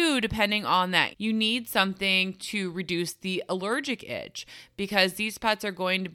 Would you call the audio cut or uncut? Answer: cut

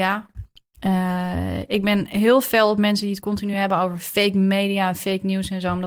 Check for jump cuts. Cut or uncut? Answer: uncut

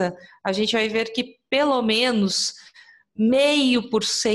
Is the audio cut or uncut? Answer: uncut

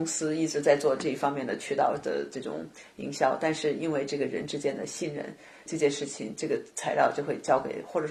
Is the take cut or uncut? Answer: uncut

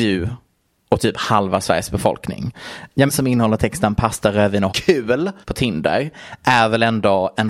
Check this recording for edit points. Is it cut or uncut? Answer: cut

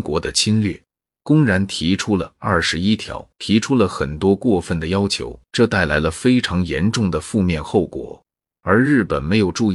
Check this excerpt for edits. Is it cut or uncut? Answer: cut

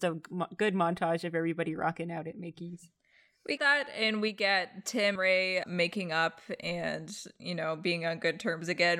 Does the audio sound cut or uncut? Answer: cut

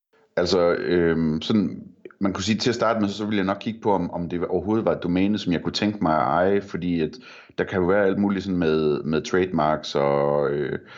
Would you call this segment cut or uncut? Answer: uncut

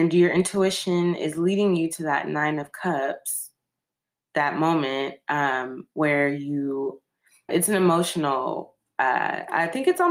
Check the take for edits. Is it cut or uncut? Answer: cut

